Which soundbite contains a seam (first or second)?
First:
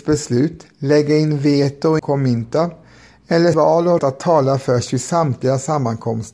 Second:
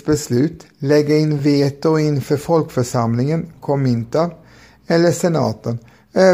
first